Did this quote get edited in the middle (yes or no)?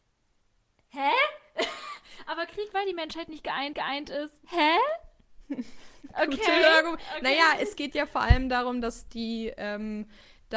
yes